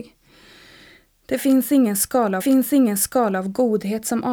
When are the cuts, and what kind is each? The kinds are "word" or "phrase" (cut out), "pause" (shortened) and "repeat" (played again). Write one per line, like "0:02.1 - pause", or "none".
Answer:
0:02.4 - repeat